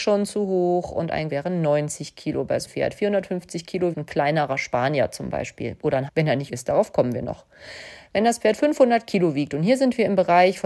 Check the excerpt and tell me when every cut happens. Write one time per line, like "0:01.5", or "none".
0:01.3
0:02.7
0:03.9
0:06.1
0:06.5